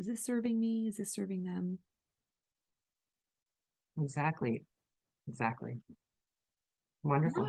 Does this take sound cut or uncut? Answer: uncut